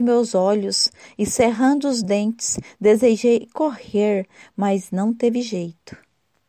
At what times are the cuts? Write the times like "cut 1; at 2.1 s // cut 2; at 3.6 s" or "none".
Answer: none